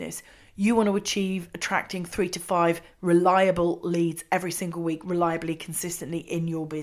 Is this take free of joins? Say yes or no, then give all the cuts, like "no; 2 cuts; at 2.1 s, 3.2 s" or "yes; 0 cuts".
yes; 0 cuts